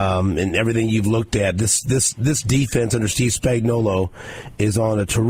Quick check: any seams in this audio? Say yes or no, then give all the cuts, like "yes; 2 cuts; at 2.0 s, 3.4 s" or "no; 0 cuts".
no; 0 cuts